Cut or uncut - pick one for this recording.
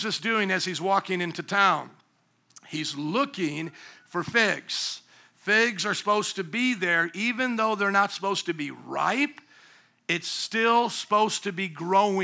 uncut